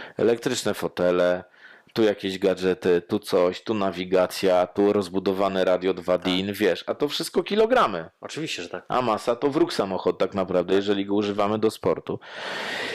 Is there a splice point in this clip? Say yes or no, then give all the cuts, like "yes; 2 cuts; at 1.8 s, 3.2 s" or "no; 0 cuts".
no; 0 cuts